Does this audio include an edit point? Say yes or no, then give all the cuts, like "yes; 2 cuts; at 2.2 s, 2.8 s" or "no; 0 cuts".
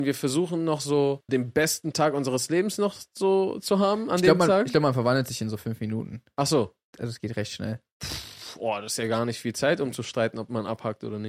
yes; 1 cut; at 1.3 s